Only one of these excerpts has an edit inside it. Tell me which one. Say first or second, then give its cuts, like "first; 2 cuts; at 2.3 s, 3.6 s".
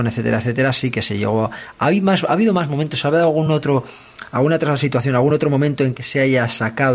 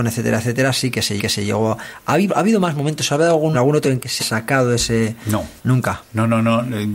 second; 6 cuts; at 1.2 s, 2.3 s, 3.5 s, 3.8 s, 4.2 s, 5.6 s